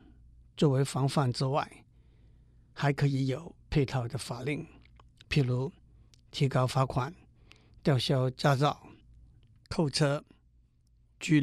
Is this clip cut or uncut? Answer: uncut